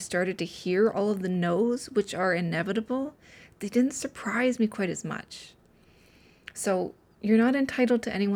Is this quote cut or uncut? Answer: uncut